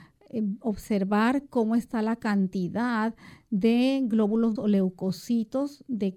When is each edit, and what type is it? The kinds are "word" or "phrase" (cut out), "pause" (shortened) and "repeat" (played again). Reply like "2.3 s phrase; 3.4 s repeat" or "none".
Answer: 4.6 s word